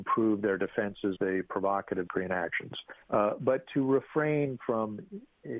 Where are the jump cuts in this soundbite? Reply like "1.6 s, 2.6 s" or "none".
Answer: 1.2 s, 2.1 s, 3.0 s

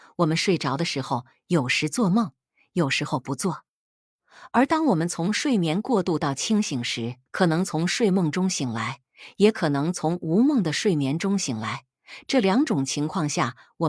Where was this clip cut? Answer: 7.3 s

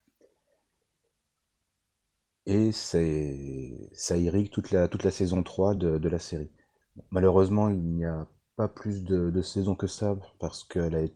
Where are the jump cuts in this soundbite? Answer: none

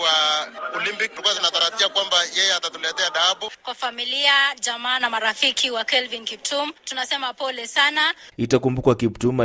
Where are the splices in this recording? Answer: 6.8 s

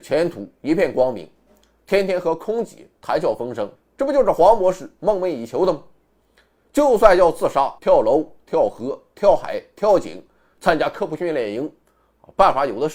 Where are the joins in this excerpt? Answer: 3.8 s, 7.8 s

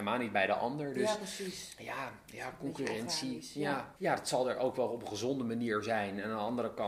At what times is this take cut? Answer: 4.0 s

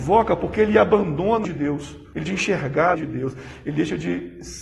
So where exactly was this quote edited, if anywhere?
1.4 s, 2.3 s, 2.9 s

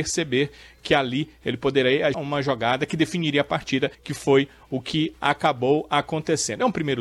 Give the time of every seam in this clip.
2.1 s, 3.9 s

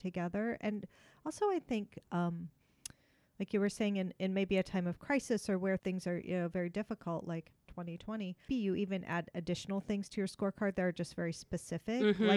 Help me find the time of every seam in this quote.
5.8 s, 8.5 s

